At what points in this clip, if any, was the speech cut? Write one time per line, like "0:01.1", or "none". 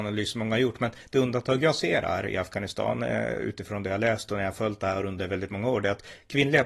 none